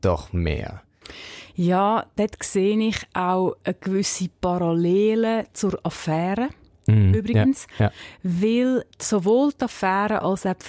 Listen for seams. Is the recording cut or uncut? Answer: uncut